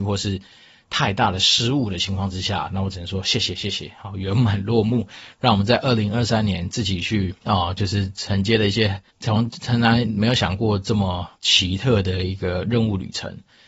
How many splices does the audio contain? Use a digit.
3